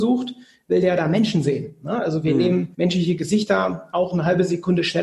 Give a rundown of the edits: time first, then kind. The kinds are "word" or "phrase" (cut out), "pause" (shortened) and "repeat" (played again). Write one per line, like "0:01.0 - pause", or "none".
0:02.7 - pause